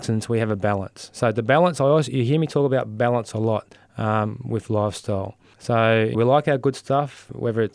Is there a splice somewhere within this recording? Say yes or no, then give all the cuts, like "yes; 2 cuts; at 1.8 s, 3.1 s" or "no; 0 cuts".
yes; 1 cut; at 6.1 s